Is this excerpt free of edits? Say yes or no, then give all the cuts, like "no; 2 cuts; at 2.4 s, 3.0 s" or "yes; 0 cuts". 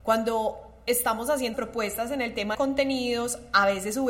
no; 2 cuts; at 1.5 s, 2.5 s